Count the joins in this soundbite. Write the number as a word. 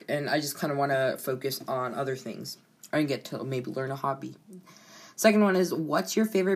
zero